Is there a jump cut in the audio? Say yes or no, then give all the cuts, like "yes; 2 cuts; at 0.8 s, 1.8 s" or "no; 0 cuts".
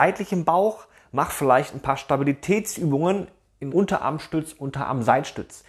yes; 1 cut; at 3.7 s